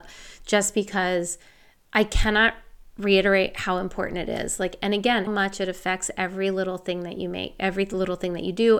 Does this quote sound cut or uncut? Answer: cut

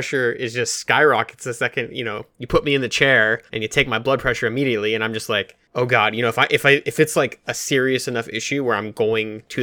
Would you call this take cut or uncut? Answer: cut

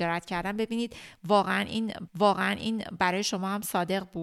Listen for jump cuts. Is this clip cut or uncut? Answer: cut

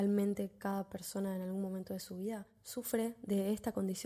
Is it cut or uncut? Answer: uncut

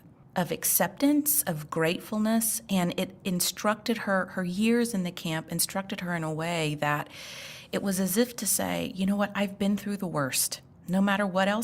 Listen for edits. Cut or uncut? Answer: cut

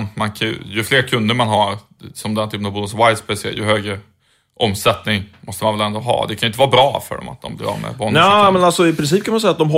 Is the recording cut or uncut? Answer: uncut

